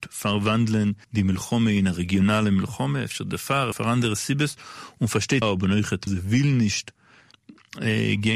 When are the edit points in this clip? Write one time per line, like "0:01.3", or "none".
0:01.0
0:03.7
0:05.4
0:06.1